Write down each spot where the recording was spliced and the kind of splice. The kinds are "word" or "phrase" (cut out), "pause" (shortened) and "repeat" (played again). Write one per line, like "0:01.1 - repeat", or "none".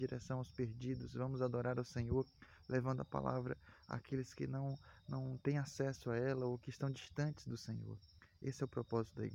none